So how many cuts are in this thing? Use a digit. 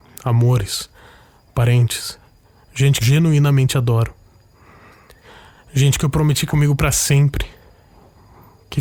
3